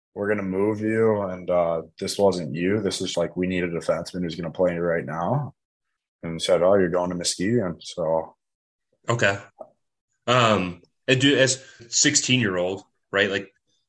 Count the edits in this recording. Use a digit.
2